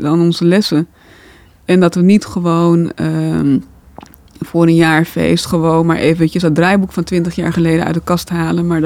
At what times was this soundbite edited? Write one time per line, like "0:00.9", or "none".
none